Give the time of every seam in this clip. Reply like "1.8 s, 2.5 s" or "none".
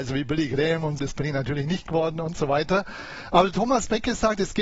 1.0 s